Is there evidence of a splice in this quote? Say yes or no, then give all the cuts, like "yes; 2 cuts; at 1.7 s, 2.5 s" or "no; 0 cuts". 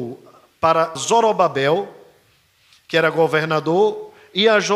yes; 1 cut; at 0.9 s